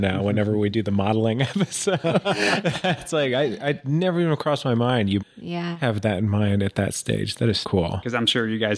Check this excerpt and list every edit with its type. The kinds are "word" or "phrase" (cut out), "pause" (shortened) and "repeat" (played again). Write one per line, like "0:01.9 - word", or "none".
0:05.2 - word
0:07.6 - word

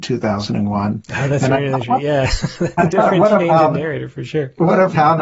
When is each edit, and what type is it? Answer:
none

